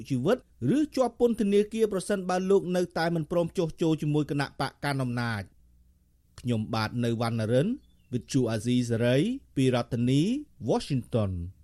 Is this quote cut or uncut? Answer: uncut